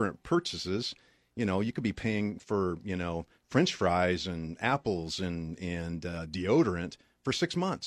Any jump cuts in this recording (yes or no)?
no